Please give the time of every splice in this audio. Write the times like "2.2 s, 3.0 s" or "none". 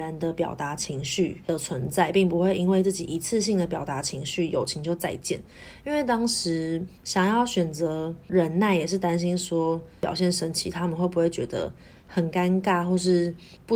7.0 s